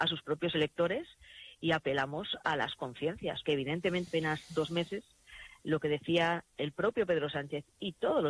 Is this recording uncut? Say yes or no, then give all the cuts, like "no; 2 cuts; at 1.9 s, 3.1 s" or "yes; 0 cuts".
no; 2 cuts; at 3.5 s, 4.1 s